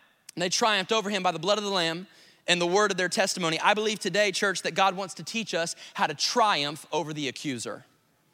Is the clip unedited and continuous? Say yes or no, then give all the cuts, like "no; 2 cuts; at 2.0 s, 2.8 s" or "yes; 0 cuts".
yes; 0 cuts